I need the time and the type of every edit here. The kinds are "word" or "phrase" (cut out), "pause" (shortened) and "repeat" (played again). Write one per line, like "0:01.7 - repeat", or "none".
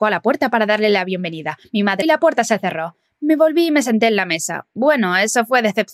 0:02.0 - word